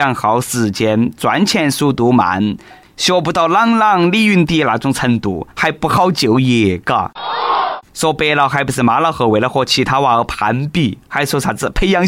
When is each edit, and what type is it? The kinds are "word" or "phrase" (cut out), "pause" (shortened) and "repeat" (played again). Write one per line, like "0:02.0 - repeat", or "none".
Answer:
none